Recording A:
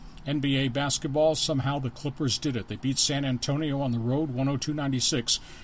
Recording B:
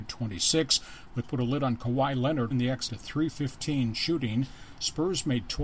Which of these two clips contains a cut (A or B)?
B